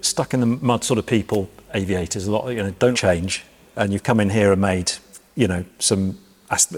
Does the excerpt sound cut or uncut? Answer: cut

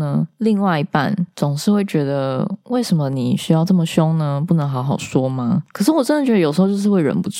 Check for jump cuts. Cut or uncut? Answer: uncut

